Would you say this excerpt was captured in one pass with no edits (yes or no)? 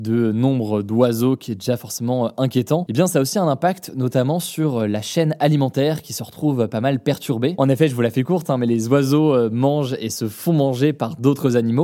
yes